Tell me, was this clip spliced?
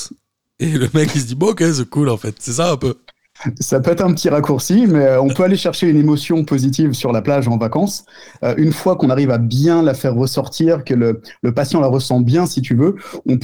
no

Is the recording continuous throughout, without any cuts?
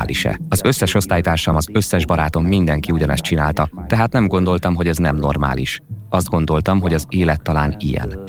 yes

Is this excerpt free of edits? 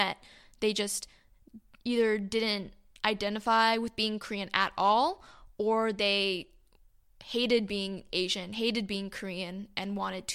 yes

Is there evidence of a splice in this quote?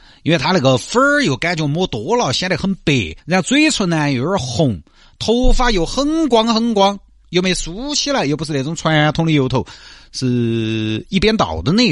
yes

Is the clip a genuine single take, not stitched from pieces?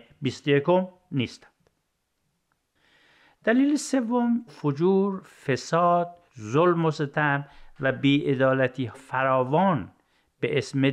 no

